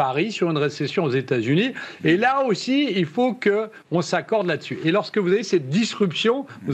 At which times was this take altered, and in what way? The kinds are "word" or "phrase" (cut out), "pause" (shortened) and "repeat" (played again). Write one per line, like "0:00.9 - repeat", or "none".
0:03.8 - pause